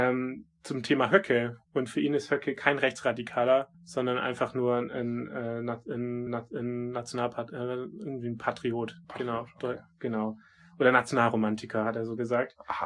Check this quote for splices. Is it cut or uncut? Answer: cut